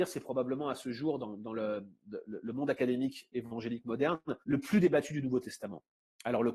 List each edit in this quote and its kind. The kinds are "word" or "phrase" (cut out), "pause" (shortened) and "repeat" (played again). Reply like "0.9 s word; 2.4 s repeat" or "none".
4.4 s pause